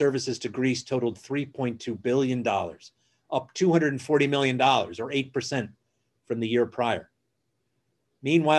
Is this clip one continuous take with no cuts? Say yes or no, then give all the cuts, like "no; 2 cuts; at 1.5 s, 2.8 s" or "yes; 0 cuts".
yes; 0 cuts